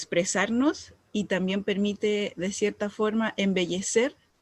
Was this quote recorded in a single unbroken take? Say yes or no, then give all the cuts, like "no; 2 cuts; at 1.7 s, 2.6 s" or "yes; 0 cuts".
yes; 0 cuts